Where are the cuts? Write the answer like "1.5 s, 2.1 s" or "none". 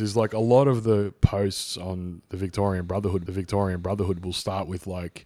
3.3 s